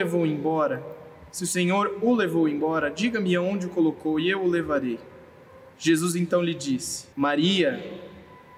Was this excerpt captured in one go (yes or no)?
no